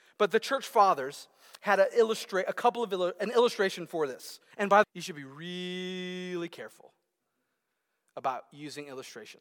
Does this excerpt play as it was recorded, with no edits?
no; 2 cuts; at 4.5 s, 4.8 s

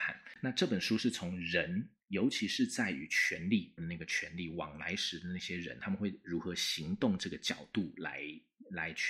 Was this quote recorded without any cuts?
no; 1 cut; at 3.8 s

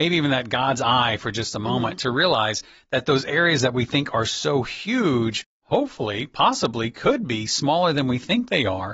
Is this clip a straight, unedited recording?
yes; 0 cuts

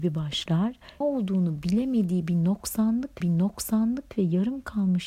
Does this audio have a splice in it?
yes; 2 cuts; at 1.0 s, 3.2 s

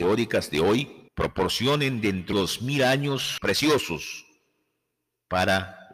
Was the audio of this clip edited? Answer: yes; 3 cuts; at 1.1 s, 2.3 s, 3.4 s

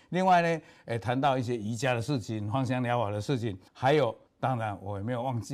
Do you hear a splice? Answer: yes; 2 cuts; at 3.7 s, 4.3 s

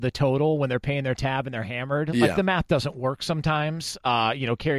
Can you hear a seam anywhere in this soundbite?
no; 0 cuts

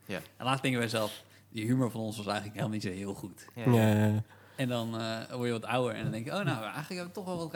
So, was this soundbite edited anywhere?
no; 0 cuts

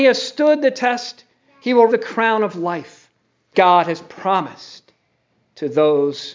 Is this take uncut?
no; 2 cuts; at 1.9 s, 3.5 s

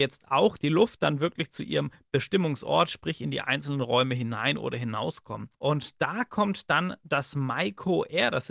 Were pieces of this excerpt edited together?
yes; 1 cut; at 5.5 s

